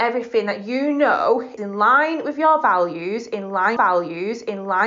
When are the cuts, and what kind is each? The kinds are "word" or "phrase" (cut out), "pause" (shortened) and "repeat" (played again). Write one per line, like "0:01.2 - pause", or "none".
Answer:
0:01.6 - word
0:03.8 - repeat